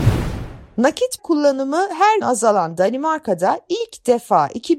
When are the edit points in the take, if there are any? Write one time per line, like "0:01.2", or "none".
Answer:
0:01.2
0:02.2